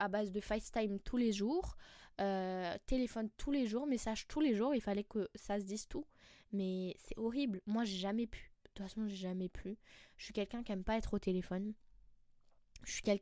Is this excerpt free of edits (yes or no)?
yes